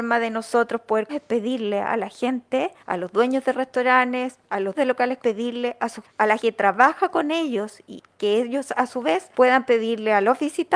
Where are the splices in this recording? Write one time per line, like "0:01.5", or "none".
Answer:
0:01.1
0:02.8
0:04.7
0:05.2
0:06.0
0:06.4
0:08.1
0:09.3